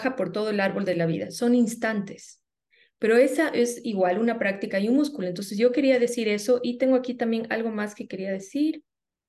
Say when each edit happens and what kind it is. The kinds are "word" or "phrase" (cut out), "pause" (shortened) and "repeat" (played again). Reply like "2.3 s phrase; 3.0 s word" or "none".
none